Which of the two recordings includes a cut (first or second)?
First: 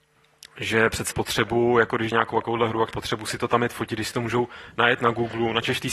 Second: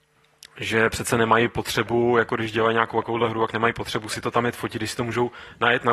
first